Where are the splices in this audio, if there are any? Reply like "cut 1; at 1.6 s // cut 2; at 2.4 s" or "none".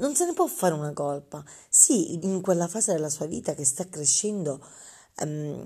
cut 1; at 2.2 s